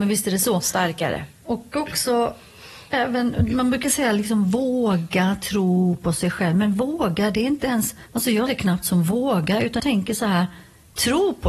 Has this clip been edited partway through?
yes; 3 cuts; at 8.1 s, 8.5 s, 9.8 s

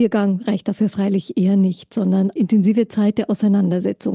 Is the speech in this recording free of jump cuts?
no; 1 cut; at 2.4 s

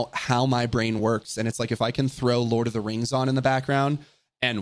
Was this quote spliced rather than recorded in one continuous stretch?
no; 0 cuts

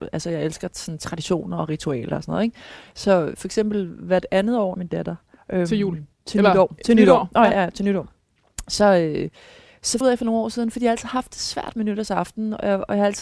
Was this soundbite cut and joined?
yes; 4 cuts; at 4.7 s, 5.4 s, 6.1 s, 10.0 s

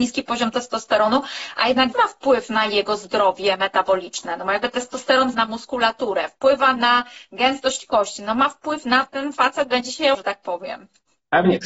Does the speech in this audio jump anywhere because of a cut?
yes; 4 cuts; at 1.9 s, 5.3 s, 9.1 s, 10.1 s

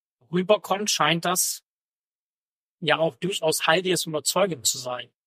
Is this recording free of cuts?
yes; 0 cuts

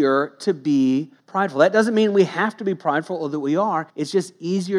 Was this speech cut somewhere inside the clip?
yes; 2 cuts; at 1.2 s, 3.9 s

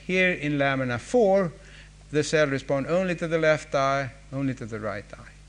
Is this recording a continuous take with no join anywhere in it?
yes; 0 cuts

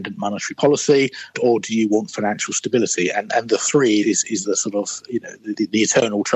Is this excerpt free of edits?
no; 1 cut; at 4.0 s

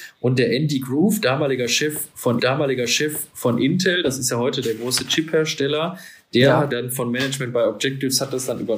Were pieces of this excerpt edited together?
yes; 2 cuts; at 2.4 s, 6.7 s

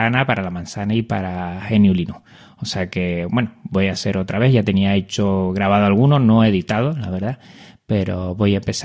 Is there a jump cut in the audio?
no; 0 cuts

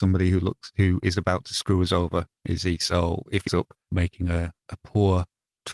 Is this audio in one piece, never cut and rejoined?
no; 3 cuts; at 3.5 s, 3.8 s, 4.6 s

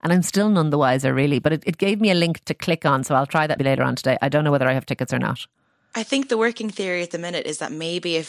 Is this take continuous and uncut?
no; 1 cut; at 3.6 s

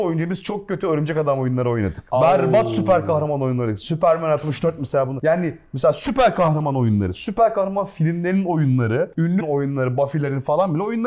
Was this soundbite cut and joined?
yes; 1 cut; at 9.4 s

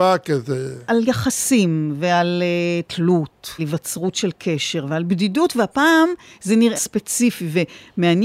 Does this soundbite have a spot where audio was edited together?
yes; 2 cuts; at 3.6 s, 6.8 s

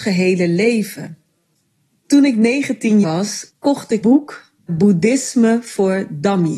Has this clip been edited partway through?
yes; 4 cuts; at 3.0 s, 3.5 s, 4.0 s, 4.6 s

